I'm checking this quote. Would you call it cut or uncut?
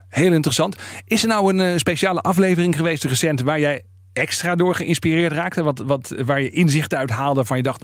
uncut